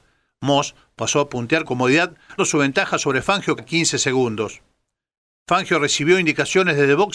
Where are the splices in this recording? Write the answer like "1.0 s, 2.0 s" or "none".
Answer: 1.6 s, 2.4 s, 3.6 s